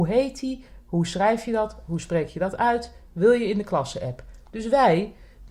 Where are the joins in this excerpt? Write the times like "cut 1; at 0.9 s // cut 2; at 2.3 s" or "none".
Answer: none